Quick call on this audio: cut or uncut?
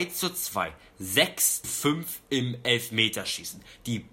cut